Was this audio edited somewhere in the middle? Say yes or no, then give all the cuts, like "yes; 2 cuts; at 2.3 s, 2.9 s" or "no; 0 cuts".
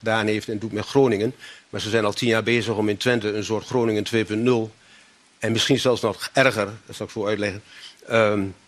no; 0 cuts